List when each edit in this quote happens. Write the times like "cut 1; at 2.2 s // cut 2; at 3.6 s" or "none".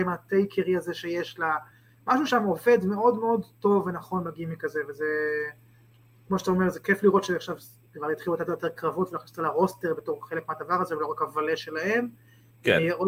none

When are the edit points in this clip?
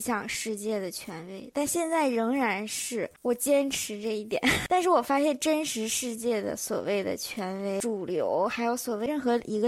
none

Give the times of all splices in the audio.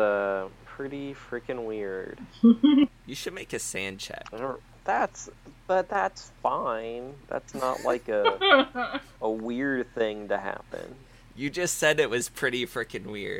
cut 1; at 2.9 s

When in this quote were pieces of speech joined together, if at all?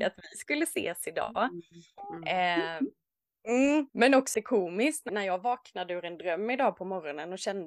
cut 1; at 3.9 s // cut 2; at 4.3 s // cut 3; at 5.1 s

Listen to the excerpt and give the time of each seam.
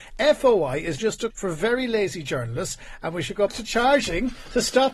cut 1; at 1.0 s // cut 2; at 1.3 s // cut 3; at 3.5 s

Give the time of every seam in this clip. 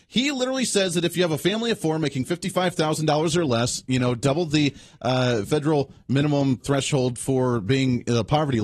cut 1; at 6.6 s

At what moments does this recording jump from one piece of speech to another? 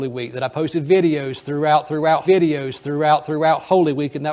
cut 1; at 2.2 s

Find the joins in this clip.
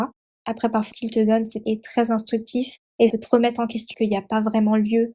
cut 1; at 0.9 s // cut 2; at 1.6 s // cut 3; at 3.1 s // cut 4; at 3.9 s

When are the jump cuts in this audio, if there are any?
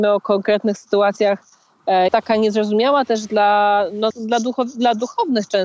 cut 1; at 2.1 s // cut 2; at 4.1 s

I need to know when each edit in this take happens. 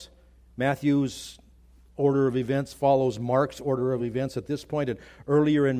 none

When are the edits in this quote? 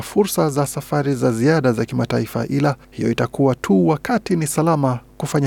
cut 1; at 2.8 s

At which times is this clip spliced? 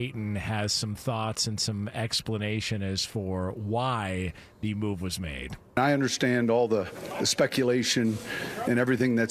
cut 1; at 5.7 s

